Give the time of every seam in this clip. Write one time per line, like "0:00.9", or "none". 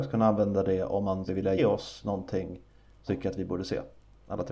0:01.3
0:01.6
0:03.1